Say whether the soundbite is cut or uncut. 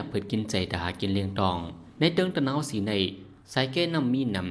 cut